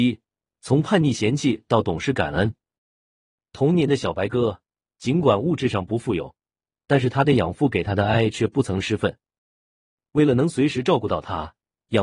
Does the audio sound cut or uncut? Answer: uncut